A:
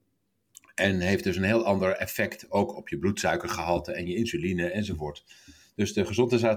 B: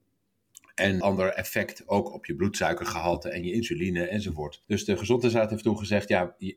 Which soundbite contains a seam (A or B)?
B